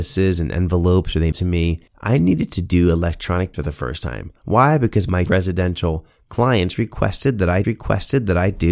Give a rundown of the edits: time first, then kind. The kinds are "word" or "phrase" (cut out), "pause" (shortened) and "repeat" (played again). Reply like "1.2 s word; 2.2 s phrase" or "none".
1.3 s phrase; 1.9 s pause; 3.5 s word; 5.3 s phrase; 7.6 s repeat